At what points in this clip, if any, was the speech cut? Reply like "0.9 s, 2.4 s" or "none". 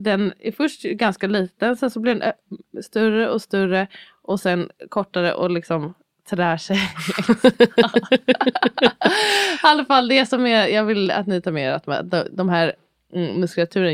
none